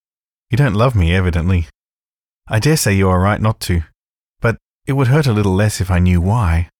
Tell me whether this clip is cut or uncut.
uncut